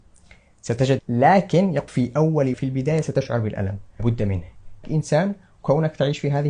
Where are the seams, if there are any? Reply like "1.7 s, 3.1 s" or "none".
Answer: 1.0 s, 1.9 s, 2.5 s, 4.0 s, 4.8 s